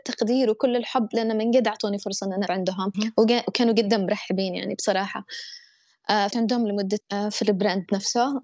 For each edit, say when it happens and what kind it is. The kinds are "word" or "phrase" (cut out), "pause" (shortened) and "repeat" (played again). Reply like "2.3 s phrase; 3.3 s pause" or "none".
2.5 s word; 2.9 s word; 6.3 s word; 7.0 s word